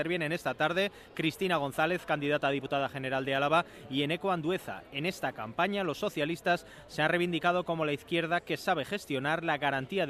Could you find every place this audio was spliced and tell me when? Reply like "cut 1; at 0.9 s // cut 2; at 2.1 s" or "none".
none